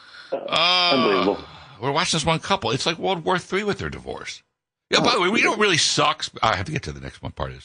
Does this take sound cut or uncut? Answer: uncut